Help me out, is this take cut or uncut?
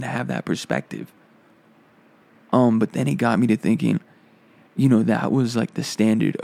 uncut